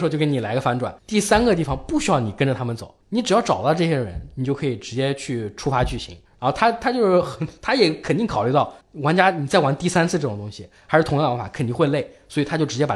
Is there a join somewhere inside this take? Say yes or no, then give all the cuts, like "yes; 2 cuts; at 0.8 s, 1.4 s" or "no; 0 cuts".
yes; 4 cuts; at 1.0 s, 3.0 s, 6.3 s, 8.8 s